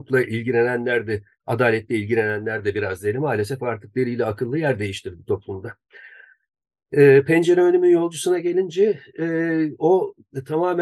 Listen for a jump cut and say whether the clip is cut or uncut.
uncut